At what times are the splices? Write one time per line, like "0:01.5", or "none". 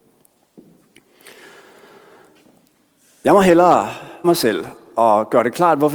0:04.2